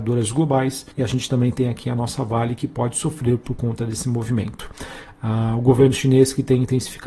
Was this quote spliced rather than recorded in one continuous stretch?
yes; 1 cut; at 0.9 s

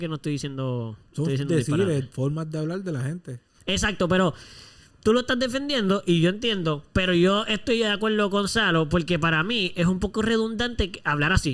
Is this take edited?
no; 0 cuts

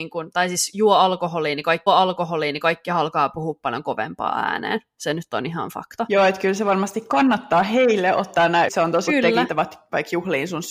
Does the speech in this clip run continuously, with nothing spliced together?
no; 4 cuts; at 1.9 s, 8.7 s, 9.1 s, 9.5 s

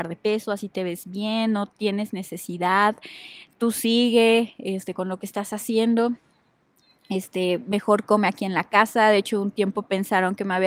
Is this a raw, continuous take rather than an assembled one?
yes; 0 cuts

